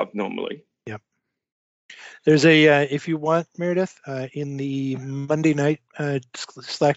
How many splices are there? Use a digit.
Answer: 1